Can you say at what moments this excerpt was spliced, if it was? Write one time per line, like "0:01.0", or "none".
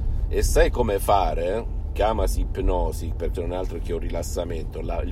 0:03.3